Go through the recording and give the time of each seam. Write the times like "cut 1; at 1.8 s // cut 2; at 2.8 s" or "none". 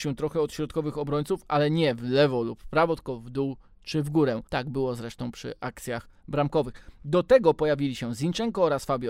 cut 1; at 4.5 s